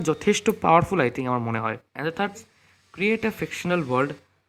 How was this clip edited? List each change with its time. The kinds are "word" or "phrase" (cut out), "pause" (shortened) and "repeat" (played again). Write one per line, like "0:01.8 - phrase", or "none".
0:01.9 - pause
0:02.3 - word

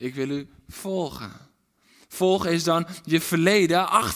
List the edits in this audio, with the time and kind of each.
none

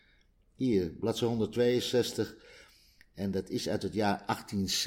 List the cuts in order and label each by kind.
none

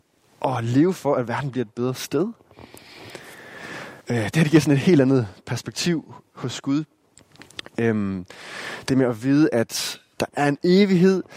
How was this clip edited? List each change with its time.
0:04.0 - pause

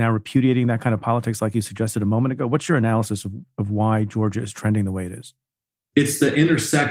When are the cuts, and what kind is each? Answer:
none

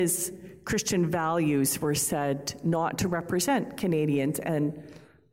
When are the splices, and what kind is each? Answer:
none

